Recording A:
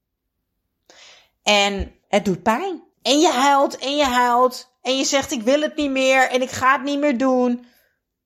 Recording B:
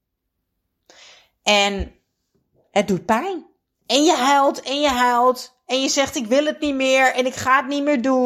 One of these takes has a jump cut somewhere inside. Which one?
A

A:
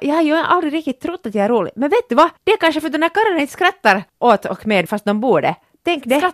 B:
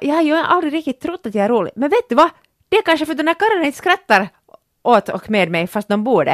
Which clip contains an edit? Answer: A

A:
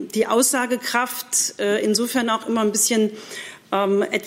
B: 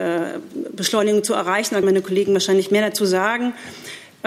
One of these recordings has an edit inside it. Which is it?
B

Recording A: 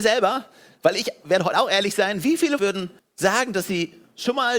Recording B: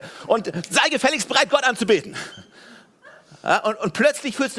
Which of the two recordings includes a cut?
A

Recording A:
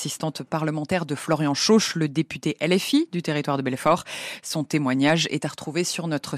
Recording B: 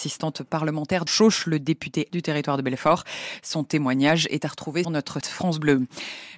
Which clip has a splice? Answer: B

